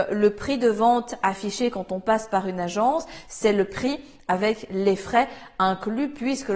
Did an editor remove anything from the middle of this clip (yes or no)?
no